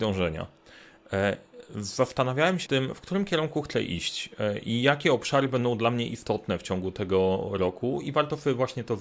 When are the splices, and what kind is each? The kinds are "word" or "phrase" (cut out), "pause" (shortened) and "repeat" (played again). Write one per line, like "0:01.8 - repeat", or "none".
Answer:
0:02.7 - word